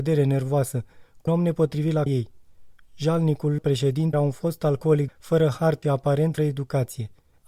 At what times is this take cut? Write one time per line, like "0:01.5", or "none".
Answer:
0:01.3
0:02.1
0:03.6
0:04.1
0:05.1
0:05.8
0:06.4